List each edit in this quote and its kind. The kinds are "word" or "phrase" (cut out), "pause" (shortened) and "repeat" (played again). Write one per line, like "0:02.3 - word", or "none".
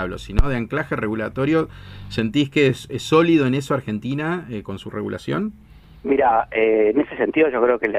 none